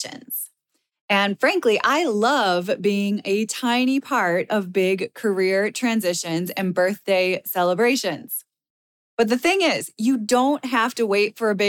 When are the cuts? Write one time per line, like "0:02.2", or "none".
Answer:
none